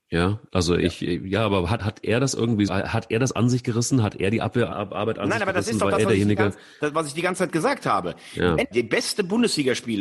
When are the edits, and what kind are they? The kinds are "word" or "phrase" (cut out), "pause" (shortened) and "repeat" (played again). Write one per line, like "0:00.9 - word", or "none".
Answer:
0:01.8 - phrase
0:02.7 - word
0:04.7 - word
0:08.7 - word